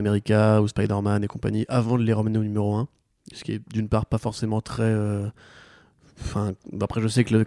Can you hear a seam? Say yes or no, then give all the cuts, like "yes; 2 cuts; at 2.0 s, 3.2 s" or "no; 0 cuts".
no; 0 cuts